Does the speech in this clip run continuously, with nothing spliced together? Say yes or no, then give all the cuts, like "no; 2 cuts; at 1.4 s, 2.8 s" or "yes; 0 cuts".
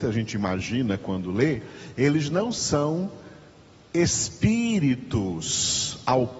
yes; 0 cuts